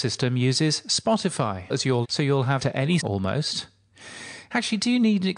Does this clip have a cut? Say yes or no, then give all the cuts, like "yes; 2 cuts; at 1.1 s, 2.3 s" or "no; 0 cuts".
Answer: yes; 4 cuts; at 1.7 s, 2.0 s, 2.6 s, 3.0 s